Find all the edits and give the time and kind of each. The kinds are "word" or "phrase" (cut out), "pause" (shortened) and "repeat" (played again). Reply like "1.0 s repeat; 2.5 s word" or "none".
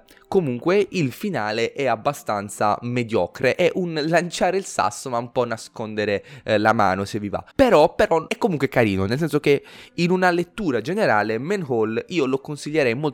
7.5 s pause